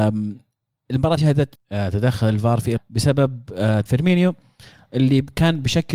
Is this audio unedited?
no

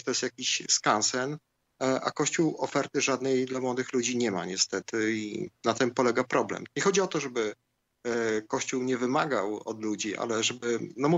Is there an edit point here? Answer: no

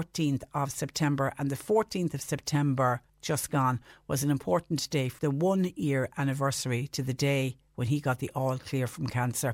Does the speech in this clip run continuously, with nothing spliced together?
no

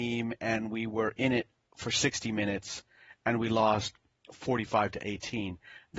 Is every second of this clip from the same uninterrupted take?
yes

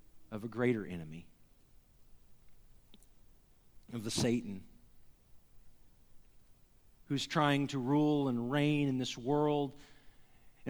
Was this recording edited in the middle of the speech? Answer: no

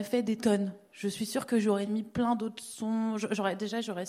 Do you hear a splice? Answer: no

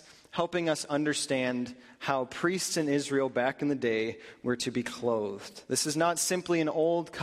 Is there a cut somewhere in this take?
no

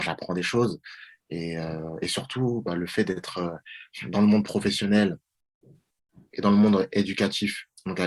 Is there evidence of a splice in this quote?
no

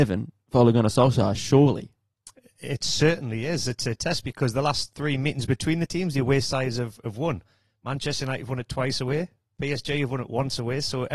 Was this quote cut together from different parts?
no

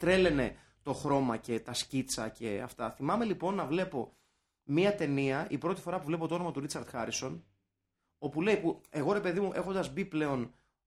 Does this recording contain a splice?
no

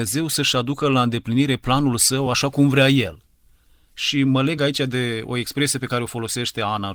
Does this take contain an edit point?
no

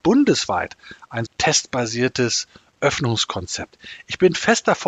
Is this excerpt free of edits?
no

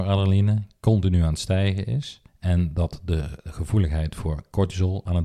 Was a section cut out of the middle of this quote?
yes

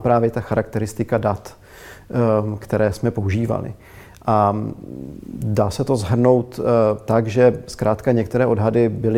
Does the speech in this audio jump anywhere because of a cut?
no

